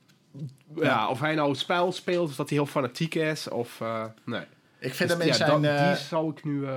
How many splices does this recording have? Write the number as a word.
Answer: zero